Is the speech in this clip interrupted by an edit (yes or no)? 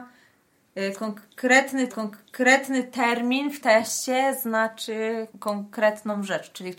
yes